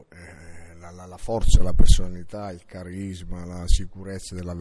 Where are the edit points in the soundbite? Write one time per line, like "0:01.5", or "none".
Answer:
none